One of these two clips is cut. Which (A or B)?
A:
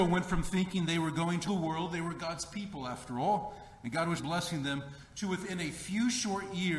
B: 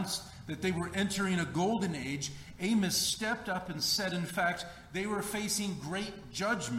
A